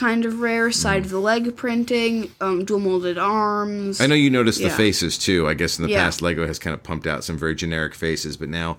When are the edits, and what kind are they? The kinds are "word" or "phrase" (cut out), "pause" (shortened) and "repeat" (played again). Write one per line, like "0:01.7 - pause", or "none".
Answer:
none

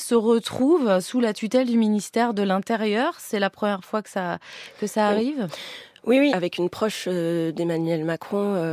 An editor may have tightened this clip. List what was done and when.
0:06.3 - word

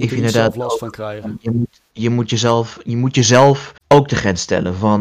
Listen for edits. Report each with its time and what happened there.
0:03.8 - pause

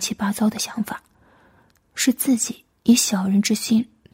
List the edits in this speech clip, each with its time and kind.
none

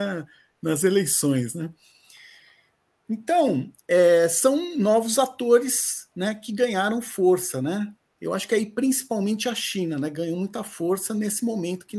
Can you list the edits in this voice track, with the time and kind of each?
none

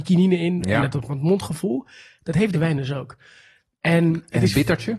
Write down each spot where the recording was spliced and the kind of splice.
0:02.5 - word

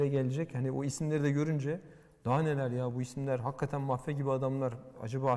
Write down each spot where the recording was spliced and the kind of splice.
none

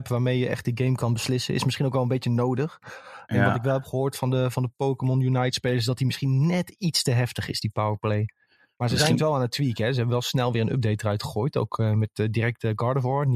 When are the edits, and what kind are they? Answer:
none

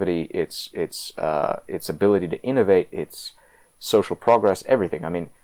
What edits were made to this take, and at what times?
none

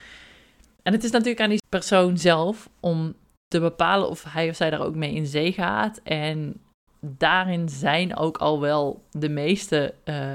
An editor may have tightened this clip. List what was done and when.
none

